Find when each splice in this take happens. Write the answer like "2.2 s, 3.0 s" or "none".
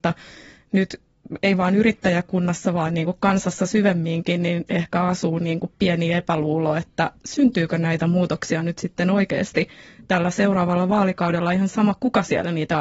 none